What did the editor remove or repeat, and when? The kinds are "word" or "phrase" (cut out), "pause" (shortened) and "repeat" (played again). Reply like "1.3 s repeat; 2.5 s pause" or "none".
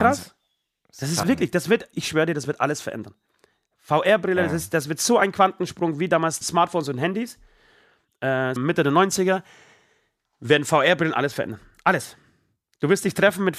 1.2 s word; 1.9 s word; 6.4 s word; 8.6 s word